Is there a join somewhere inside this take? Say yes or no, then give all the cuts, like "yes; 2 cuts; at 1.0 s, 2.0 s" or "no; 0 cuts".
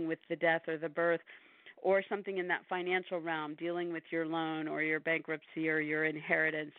no; 0 cuts